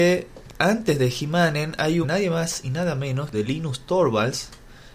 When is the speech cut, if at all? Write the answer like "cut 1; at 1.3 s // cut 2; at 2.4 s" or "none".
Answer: cut 1; at 2.0 s // cut 2; at 3.3 s